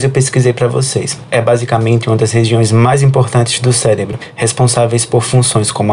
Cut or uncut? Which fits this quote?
uncut